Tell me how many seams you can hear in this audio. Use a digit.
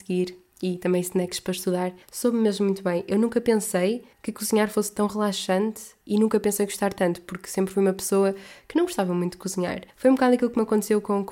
4